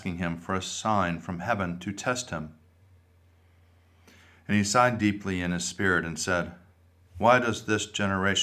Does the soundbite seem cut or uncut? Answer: uncut